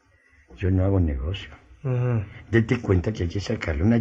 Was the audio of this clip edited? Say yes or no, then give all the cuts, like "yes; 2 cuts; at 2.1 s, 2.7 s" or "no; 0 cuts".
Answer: no; 0 cuts